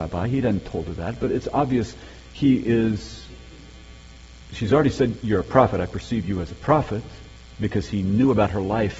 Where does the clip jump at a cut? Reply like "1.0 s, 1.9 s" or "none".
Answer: none